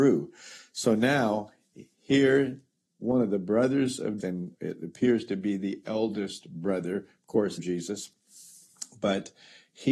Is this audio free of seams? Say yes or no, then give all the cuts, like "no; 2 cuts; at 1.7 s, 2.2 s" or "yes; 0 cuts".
no; 3 cuts; at 4.2 s, 4.5 s, 7.6 s